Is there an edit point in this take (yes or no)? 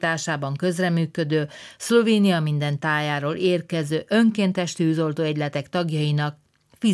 no